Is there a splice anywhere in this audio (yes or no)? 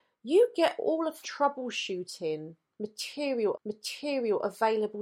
yes